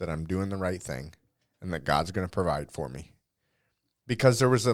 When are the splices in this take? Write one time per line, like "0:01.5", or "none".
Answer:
none